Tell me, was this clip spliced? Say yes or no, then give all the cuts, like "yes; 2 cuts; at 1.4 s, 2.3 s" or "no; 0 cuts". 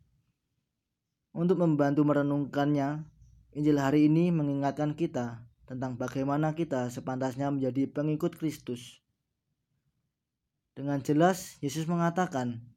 no; 0 cuts